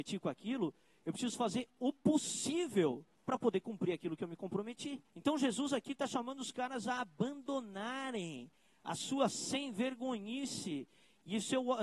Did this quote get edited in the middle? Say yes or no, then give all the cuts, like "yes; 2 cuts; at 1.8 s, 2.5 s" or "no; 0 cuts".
yes; 2 cuts; at 3.1 s, 5.1 s